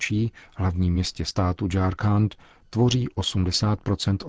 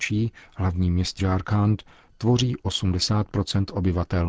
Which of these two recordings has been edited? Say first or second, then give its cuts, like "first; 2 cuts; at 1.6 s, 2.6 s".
second; 1 cut; at 1.2 s